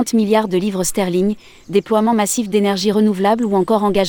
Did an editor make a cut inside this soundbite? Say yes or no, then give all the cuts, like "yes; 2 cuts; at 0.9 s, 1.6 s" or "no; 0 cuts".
no; 0 cuts